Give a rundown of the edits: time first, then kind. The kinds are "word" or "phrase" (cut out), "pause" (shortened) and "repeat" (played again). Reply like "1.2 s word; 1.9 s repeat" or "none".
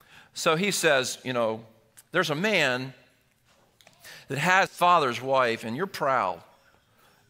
4.7 s word